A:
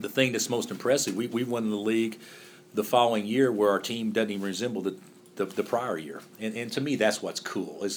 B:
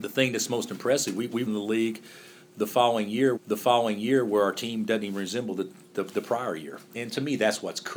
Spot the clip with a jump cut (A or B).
B